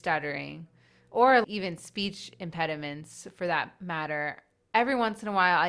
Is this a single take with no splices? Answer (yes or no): no